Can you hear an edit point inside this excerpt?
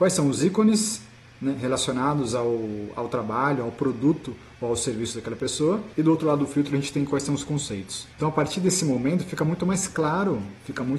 no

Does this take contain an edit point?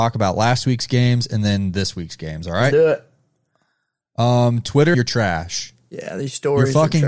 yes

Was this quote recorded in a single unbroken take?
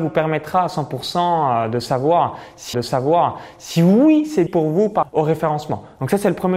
no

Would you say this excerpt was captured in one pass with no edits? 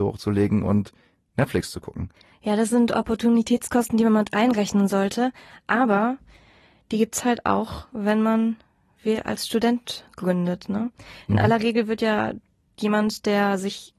yes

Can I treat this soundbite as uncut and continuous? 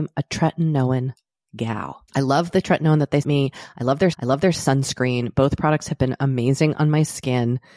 no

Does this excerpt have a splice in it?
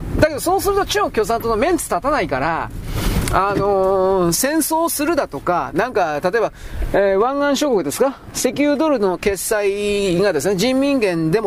no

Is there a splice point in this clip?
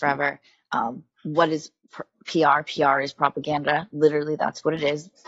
no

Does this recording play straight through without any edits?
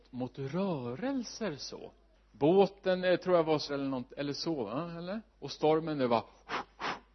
no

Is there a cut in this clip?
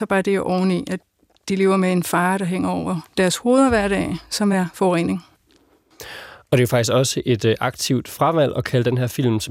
no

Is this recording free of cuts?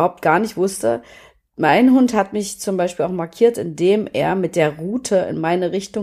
yes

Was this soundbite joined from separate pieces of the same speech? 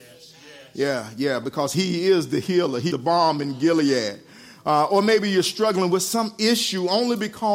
yes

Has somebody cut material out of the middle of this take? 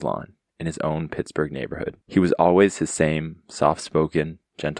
yes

